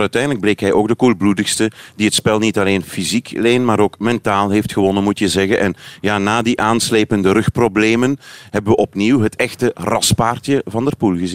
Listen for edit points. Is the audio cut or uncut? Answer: uncut